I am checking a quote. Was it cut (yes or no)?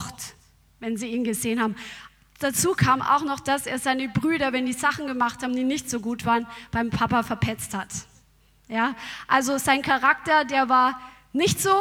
no